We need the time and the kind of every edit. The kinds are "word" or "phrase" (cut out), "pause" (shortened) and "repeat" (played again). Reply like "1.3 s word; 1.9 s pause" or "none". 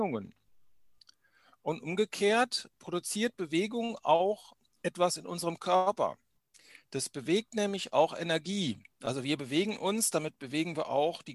2.7 s word